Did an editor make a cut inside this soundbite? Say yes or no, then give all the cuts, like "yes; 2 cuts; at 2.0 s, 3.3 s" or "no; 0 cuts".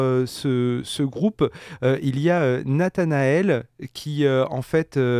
no; 0 cuts